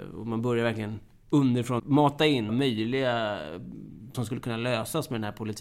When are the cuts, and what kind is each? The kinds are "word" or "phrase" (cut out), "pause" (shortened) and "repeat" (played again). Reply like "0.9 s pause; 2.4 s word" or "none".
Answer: 1.8 s word; 2.5 s word; 4.1 s word